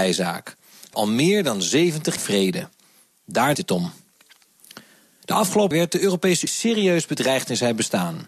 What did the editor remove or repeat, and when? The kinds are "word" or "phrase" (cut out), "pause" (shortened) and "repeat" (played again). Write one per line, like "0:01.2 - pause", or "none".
0:00.9 - word
0:02.2 - word
0:03.5 - word
0:05.7 - word
0:06.5 - word